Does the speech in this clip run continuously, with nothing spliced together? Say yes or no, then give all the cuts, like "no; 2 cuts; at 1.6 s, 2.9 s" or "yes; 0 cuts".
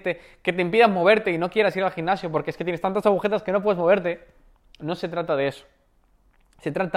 yes; 0 cuts